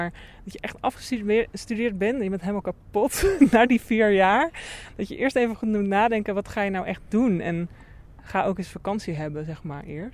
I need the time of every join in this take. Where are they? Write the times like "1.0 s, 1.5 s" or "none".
none